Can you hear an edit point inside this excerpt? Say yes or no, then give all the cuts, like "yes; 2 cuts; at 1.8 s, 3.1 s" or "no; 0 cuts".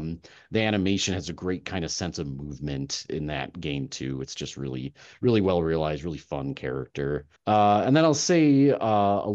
yes; 1 cut; at 7.4 s